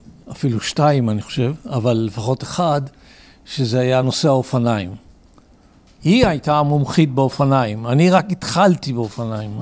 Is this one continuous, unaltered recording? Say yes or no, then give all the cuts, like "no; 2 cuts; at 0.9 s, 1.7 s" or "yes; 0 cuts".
yes; 0 cuts